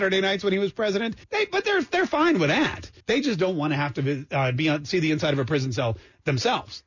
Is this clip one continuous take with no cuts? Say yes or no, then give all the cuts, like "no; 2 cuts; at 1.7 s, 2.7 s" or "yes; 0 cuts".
no; 2 cuts; at 1.2 s, 3.0 s